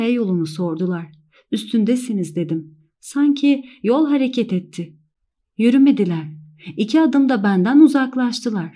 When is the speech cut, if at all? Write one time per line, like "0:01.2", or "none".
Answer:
none